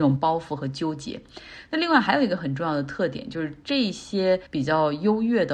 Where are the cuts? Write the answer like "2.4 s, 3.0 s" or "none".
4.5 s